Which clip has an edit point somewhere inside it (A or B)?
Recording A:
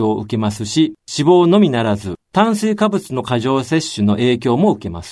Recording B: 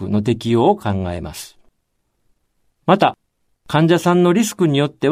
A